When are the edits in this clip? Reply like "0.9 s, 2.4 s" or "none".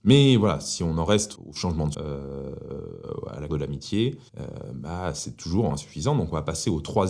1.4 s, 1.9 s, 3.5 s, 4.3 s, 5.7 s